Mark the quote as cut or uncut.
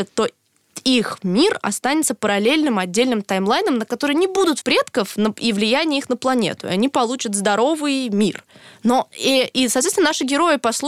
cut